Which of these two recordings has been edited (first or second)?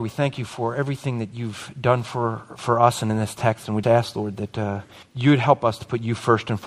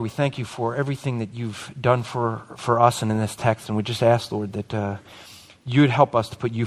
first